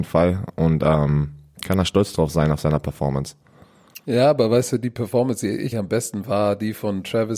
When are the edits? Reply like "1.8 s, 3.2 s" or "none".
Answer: 5.7 s, 6.2 s